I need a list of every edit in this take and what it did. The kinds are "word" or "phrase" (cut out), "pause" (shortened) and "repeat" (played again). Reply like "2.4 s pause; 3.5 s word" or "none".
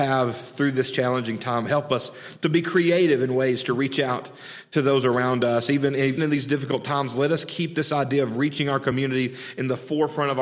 6.2 s word